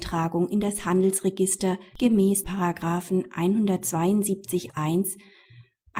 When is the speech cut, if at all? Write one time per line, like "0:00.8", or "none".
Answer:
0:02.4
0:04.7